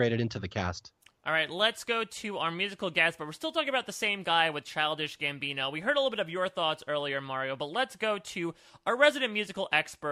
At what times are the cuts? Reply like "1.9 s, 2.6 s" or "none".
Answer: none